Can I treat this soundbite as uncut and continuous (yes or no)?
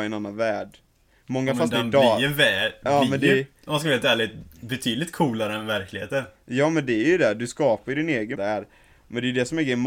no